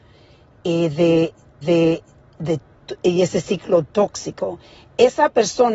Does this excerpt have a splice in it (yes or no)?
yes